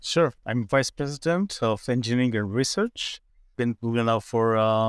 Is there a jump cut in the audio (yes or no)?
no